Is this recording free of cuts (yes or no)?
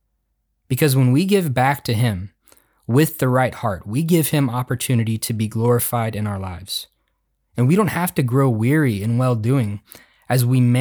yes